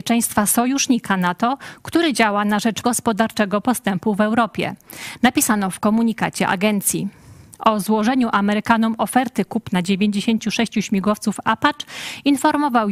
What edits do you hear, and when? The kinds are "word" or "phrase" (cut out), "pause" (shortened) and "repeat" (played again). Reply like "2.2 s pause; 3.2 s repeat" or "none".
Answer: 2.8 s phrase